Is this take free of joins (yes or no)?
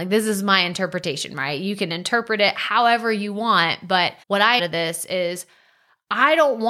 no